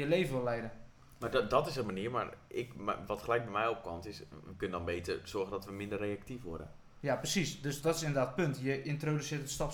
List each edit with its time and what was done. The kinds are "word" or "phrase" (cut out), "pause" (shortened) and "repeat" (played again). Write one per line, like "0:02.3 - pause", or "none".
0:07.8 - word